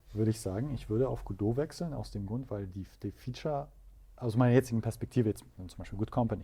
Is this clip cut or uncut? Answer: uncut